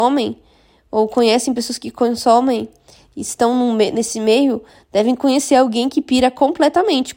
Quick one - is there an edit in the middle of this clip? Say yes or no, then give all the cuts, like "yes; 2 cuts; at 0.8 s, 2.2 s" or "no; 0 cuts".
no; 0 cuts